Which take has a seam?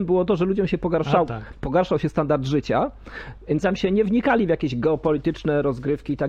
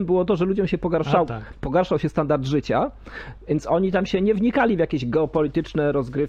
first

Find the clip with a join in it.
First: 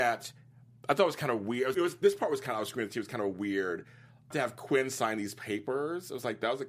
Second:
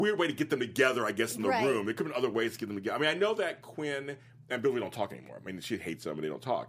first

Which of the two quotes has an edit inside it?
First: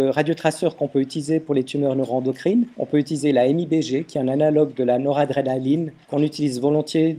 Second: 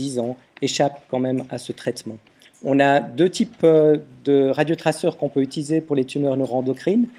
first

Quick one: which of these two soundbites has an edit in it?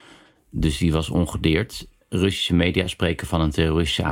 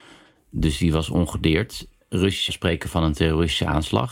second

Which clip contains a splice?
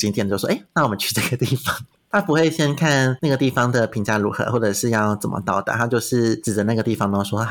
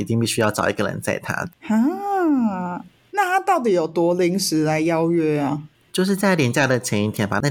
second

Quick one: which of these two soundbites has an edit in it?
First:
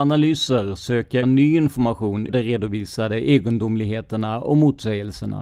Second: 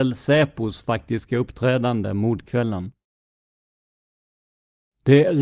first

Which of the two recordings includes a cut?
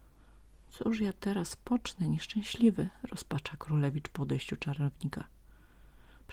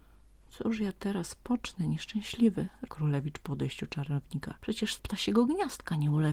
second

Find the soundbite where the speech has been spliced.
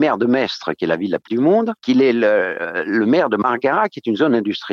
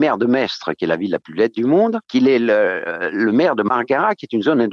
first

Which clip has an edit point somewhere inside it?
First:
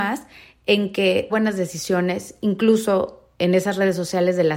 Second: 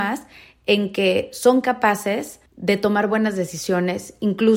first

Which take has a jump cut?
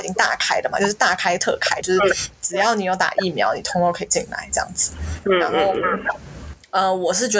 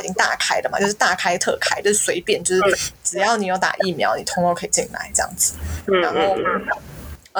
first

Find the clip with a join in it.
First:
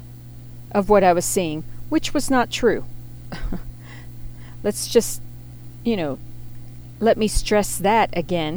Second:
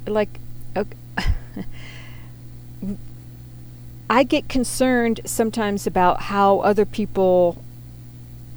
second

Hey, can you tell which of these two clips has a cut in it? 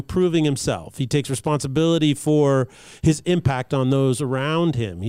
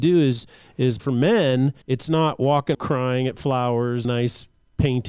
second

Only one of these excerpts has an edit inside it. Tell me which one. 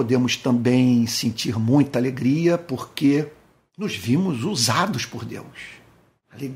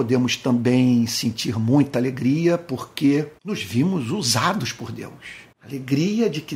second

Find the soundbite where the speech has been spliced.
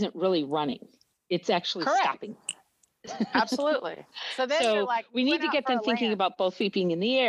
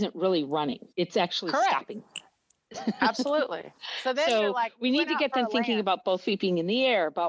second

